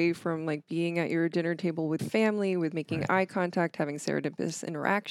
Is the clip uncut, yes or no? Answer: no